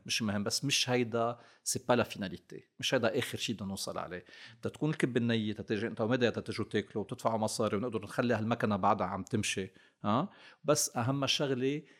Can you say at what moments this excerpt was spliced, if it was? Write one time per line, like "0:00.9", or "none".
none